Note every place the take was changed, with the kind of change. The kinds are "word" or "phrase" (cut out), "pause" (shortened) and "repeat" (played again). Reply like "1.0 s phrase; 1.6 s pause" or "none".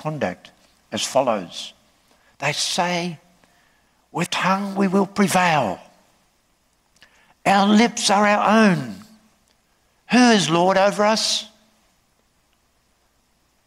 4.3 s word